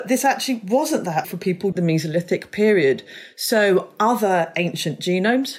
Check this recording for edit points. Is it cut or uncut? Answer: cut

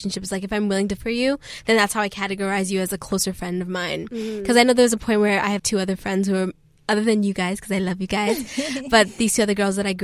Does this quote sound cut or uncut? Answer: cut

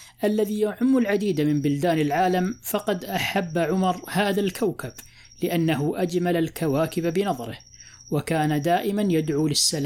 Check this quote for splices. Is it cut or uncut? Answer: uncut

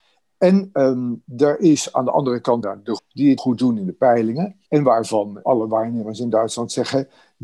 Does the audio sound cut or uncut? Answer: cut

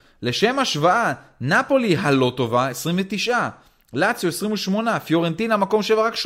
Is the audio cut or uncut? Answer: uncut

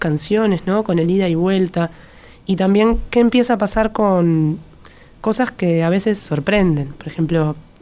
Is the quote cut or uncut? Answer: uncut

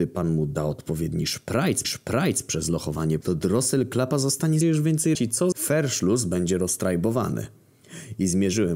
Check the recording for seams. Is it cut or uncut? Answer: cut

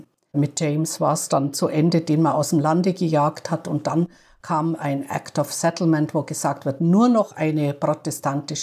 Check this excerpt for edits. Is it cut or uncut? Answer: uncut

